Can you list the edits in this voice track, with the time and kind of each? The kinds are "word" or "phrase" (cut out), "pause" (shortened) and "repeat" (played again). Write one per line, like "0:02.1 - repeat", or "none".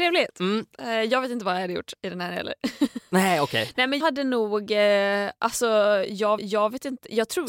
0:04.0 - word
0:06.4 - repeat